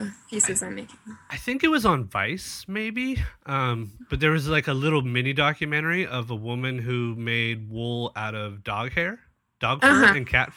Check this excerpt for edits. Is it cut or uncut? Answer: uncut